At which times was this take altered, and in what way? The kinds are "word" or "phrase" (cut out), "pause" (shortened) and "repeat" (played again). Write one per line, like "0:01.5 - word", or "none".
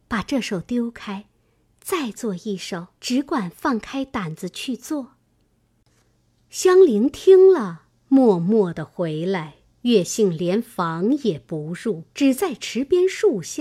0:03.0 - pause
0:12.1 - pause